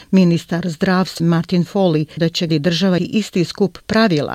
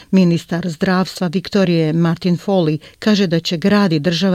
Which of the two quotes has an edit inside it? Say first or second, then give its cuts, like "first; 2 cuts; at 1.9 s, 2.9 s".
first; 4 cuts; at 1.2 s, 2.2 s, 2.5 s, 3.0 s